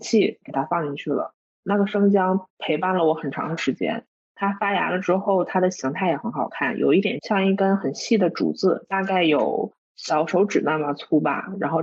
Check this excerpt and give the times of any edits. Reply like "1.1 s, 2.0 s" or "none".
none